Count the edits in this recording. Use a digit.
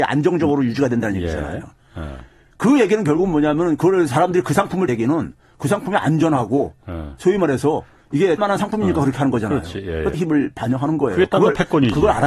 3